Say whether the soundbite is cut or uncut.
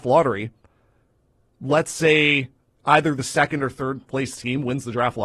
uncut